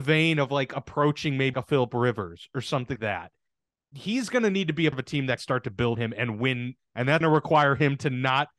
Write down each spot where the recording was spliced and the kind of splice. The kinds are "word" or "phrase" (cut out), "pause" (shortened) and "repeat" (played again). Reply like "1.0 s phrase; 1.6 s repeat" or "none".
1.5 s word; 3.0 s word; 4.9 s word; 5.4 s word; 5.9 s word; 6.8 s word; 7.2 s word